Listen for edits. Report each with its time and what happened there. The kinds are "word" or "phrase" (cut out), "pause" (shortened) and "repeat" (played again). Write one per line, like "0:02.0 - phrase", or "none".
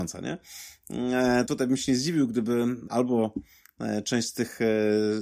0:01.5 - word
0:02.9 - word